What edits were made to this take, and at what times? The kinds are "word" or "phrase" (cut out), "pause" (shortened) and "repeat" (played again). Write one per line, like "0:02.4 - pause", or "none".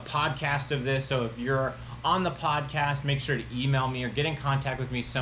none